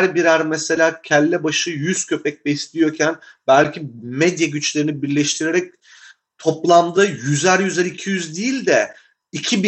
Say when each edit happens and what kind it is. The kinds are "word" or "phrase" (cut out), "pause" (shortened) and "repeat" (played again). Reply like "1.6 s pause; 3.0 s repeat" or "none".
none